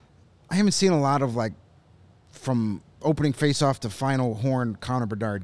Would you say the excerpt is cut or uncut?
uncut